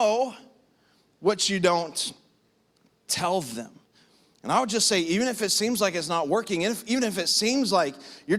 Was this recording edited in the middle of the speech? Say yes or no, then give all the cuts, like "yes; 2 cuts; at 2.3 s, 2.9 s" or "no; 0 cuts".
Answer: no; 0 cuts